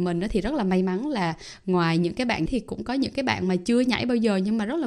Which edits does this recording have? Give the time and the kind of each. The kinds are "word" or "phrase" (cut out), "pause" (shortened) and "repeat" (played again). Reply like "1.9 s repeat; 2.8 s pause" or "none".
2.5 s word